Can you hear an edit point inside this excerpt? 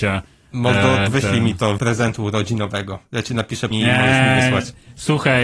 yes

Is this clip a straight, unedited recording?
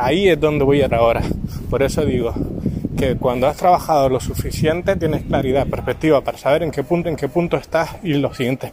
no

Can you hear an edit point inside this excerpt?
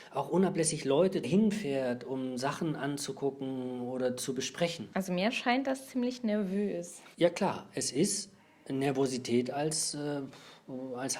yes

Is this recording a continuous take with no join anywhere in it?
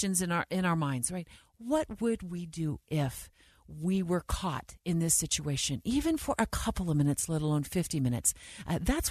yes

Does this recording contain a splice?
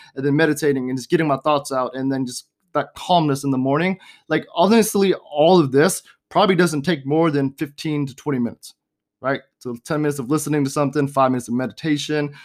no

